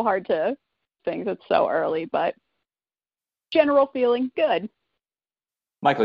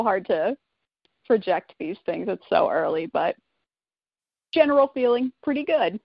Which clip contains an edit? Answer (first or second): first